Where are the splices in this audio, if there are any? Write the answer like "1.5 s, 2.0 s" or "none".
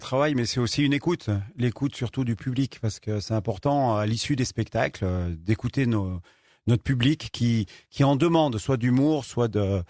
none